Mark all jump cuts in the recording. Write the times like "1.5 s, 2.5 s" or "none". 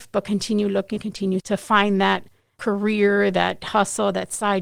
1.0 s, 1.4 s, 3.6 s